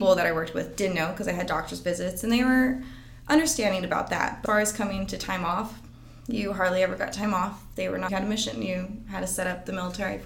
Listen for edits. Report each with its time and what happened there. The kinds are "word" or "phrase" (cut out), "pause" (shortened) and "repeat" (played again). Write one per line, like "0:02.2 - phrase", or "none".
0:04.5 - word
0:08.1 - word